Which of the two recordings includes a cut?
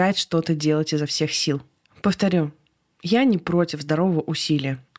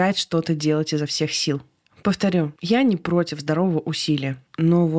second; 1 cut; at 2.6 s

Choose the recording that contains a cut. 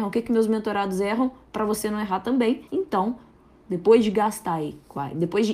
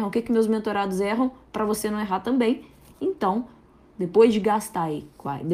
first; 1 cut; at 2.7 s

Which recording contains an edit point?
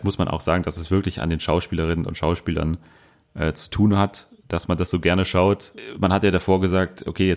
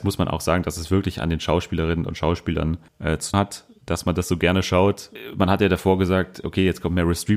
second; 2 cuts; at 2.9 s, 3.3 s

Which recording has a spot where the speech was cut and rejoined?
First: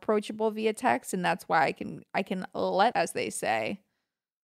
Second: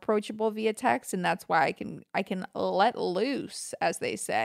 first; 1 cut; at 2.9 s

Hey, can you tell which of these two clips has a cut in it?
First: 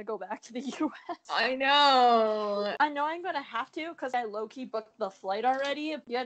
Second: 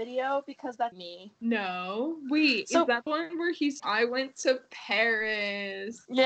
second; 3 cuts; at 0.9 s, 3.1 s, 3.8 s

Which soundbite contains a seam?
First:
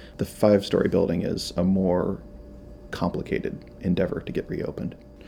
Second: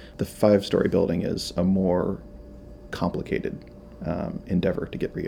first; 1 cut; at 3.8 s

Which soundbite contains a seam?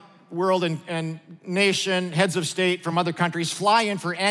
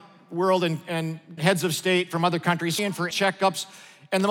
second; 3 cuts; at 1.4 s, 2.8 s, 3.1 s

